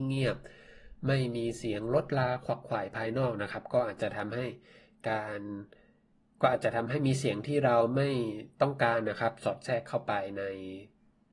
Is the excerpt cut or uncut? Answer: uncut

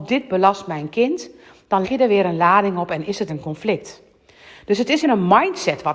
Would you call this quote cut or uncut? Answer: cut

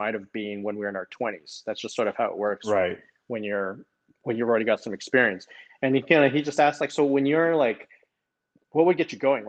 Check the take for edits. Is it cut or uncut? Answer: uncut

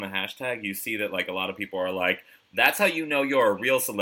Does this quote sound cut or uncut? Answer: uncut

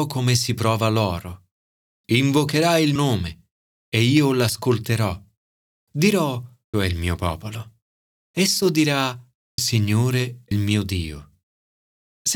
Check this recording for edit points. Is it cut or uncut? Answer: cut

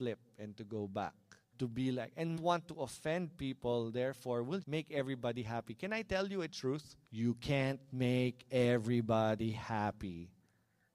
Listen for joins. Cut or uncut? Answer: cut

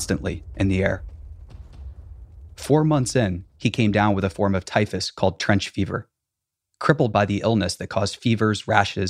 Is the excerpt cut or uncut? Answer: uncut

